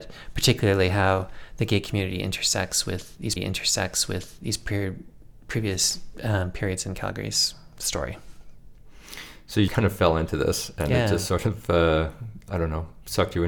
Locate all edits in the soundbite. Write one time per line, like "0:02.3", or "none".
0:03.4
0:09.7